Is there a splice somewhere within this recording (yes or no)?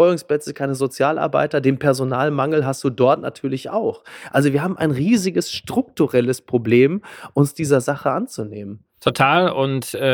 no